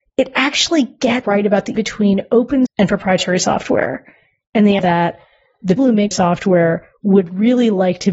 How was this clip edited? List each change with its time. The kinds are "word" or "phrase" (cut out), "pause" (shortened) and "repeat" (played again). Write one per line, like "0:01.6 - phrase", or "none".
0:01.2 - word
0:01.8 - word
0:02.7 - word
0:04.8 - word
0:05.8 - word
0:06.1 - word